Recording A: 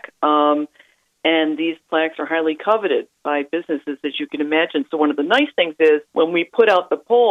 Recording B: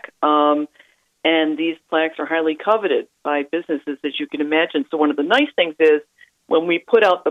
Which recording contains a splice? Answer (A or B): A